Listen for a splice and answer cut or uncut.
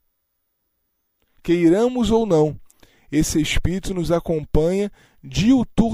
uncut